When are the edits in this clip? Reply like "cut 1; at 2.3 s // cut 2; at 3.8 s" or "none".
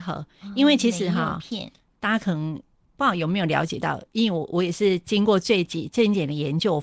none